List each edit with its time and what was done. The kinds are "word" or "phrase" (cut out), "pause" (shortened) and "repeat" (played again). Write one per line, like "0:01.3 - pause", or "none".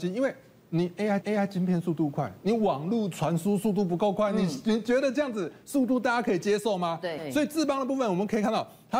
0:01.2 - repeat